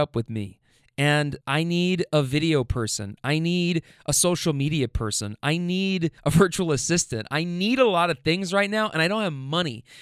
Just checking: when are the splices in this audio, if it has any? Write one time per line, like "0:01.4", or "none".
0:01.4
0:06.2

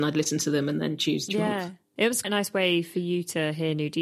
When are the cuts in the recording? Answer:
0:01.3
0:02.2

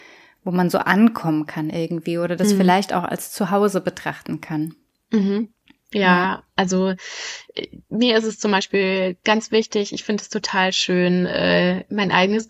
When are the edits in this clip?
none

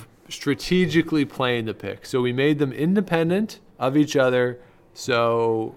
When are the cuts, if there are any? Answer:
0:03.7

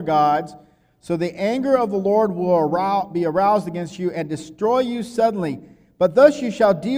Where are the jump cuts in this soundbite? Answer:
none

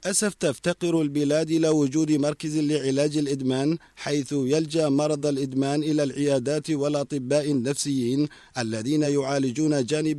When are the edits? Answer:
none

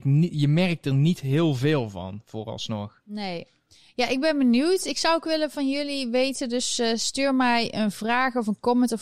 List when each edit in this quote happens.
none

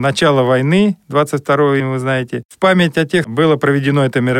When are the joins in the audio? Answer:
0:01.8
0:03.2

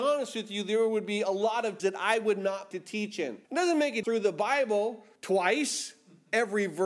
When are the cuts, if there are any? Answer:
0:01.8
0:02.7
0:03.4
0:04.0
0:05.2

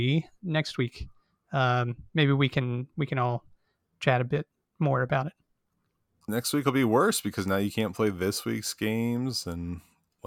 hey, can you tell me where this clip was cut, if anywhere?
none

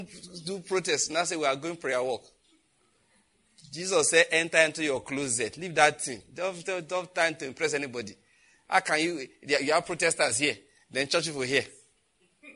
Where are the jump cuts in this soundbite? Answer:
none

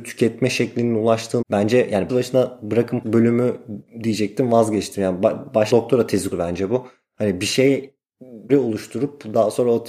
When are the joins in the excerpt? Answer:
0:01.4
0:02.1
0:03.0
0:05.7
0:06.3
0:08.5

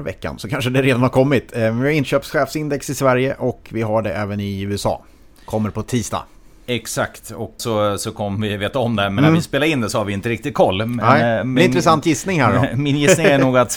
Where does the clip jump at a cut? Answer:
0:07.6

